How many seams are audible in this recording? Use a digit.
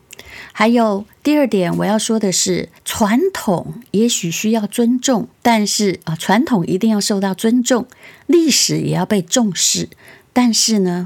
2